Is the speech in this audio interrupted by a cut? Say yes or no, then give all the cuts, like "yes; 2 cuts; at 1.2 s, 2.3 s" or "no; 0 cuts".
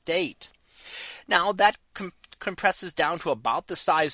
no; 0 cuts